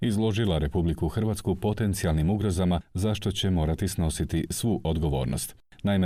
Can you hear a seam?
no; 0 cuts

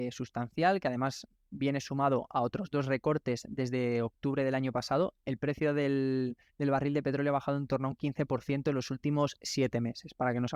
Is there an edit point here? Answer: no; 0 cuts

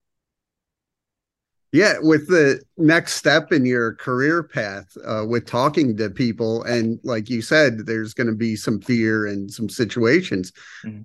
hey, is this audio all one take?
yes; 0 cuts

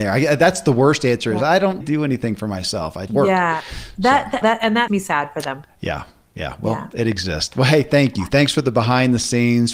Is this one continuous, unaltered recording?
no; 4 cuts; at 1.8 s, 3.1 s, 4.4 s, 4.9 s

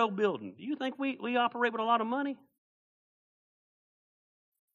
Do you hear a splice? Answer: no; 0 cuts

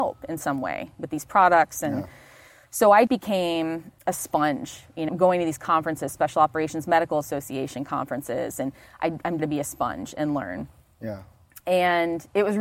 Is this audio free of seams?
no; 4 cuts; at 3.1 s, 4.0 s, 5.1 s, 9.4 s

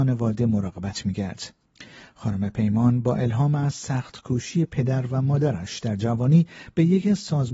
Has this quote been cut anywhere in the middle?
no; 0 cuts

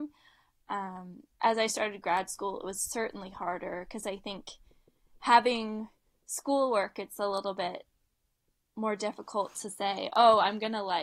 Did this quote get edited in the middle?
no; 0 cuts

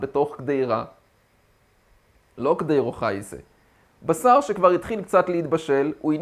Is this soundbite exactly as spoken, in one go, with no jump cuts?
yes; 0 cuts

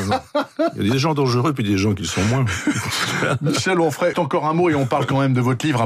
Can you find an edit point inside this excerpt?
yes; 1 cut; at 4.1 s

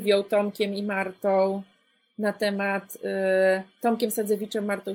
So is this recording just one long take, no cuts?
yes; 0 cuts

